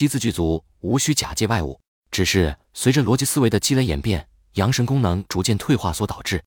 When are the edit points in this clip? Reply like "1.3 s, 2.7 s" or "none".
1.9 s, 2.6 s